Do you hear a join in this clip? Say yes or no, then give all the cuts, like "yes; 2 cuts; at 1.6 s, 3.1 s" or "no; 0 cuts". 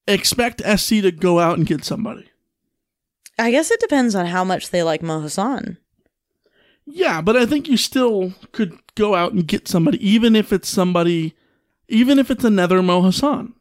no; 0 cuts